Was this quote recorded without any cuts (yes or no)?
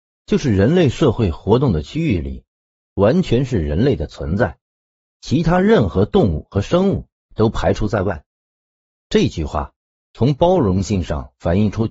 yes